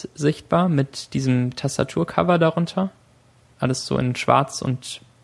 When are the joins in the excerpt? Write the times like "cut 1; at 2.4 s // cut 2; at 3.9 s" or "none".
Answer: none

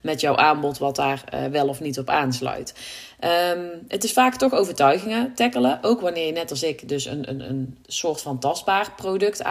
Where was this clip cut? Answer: cut 1; at 7.8 s

